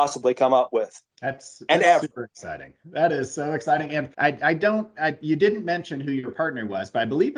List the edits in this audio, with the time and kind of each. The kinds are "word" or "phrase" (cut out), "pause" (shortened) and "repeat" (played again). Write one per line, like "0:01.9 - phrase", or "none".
0:01.1 - pause
0:04.1 - pause